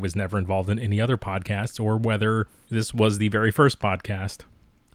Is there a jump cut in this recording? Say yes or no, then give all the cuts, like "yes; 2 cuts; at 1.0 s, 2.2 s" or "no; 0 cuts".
no; 0 cuts